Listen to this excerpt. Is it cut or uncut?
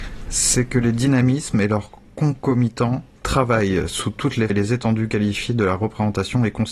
cut